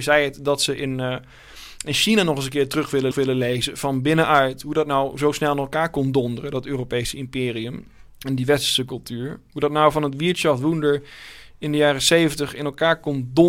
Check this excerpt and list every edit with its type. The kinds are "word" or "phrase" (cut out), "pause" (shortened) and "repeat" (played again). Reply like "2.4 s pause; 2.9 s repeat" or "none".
3.1 s repeat; 8.1 s pause